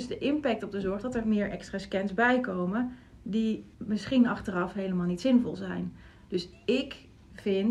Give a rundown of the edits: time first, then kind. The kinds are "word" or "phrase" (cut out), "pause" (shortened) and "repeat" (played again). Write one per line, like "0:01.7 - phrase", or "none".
0:03.7 - pause